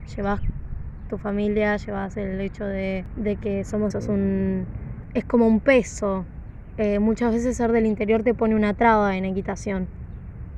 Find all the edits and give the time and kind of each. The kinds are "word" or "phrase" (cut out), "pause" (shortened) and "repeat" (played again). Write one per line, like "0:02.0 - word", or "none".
0:03.9 - phrase

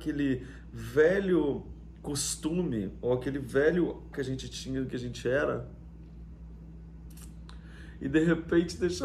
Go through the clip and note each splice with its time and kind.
0:04.1 - word

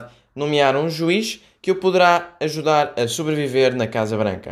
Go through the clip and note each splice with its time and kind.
none

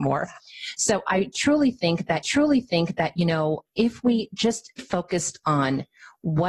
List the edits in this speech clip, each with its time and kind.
0:02.2 - repeat
0:03.7 - pause
0:04.8 - word

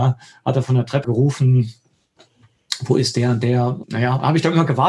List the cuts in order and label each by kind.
0:01.0 - word
0:03.8 - word

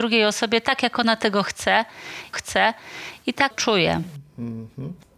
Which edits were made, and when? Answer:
0:02.3 - repeat
0:03.5 - phrase

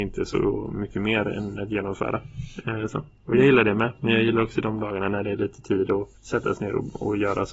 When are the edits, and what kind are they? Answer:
0:06.2 - pause

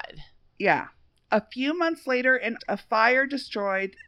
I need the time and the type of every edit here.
0:02.6 - word

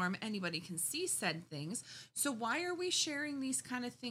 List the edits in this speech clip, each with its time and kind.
none

